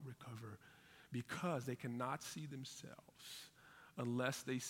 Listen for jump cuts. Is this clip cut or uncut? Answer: uncut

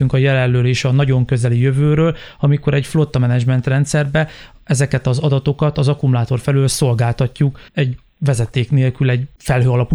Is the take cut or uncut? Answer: cut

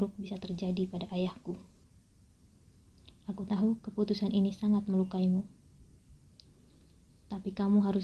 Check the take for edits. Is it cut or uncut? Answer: uncut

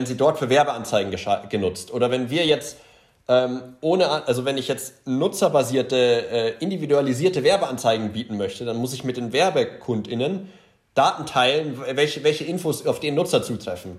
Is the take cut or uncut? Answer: uncut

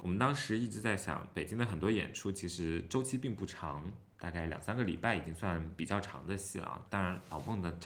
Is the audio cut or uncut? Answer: cut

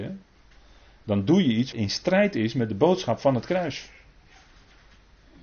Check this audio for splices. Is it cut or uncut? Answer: cut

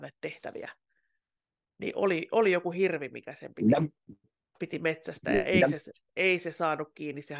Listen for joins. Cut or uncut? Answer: uncut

